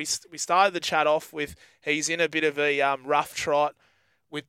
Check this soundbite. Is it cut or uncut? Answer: uncut